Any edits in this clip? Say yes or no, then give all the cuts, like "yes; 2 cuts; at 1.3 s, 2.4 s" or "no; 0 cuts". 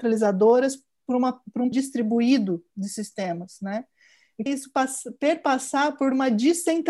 yes; 2 cuts; at 1.7 s, 4.5 s